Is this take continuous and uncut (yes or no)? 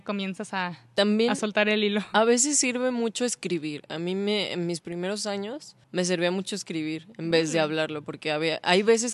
no